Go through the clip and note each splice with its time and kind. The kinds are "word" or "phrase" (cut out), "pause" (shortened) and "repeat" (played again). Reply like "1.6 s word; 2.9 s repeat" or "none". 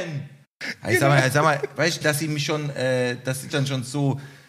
2.0 s word; 3.5 s word